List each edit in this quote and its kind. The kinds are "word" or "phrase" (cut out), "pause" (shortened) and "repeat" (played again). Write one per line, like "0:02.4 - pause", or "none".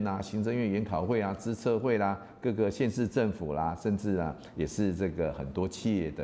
none